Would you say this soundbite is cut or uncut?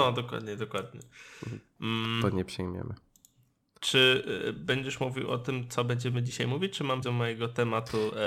cut